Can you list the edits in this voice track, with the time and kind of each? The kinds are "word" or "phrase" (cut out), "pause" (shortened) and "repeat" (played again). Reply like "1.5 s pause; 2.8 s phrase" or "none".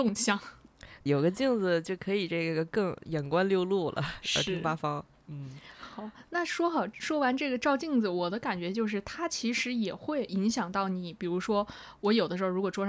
1.1 s word